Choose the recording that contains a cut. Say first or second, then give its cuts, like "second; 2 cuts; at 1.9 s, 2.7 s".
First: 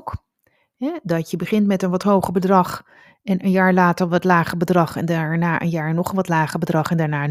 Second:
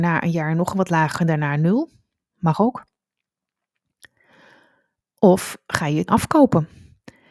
second; 2 cuts; at 1.1 s, 6.1 s